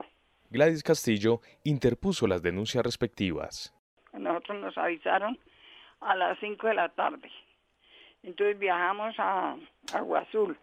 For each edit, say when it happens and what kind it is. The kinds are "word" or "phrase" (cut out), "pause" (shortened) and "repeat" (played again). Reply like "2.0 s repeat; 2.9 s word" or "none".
none